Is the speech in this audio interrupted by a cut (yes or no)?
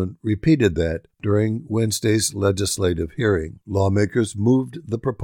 yes